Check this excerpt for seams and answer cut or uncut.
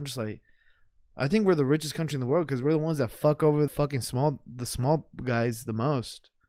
cut